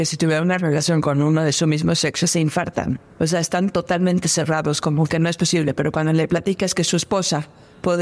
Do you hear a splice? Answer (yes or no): yes